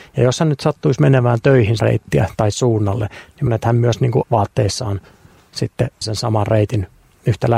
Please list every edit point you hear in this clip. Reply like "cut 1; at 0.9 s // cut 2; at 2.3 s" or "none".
cut 1; at 1.8 s // cut 2; at 2.5 s // cut 3; at 3.5 s // cut 4; at 4.2 s // cut 5; at 6.0 s